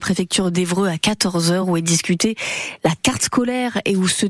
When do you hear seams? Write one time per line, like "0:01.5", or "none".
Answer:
none